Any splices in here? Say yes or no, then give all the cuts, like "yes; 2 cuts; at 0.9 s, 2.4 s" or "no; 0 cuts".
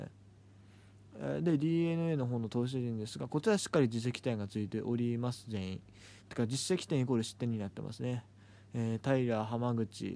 yes; 1 cut; at 6.2 s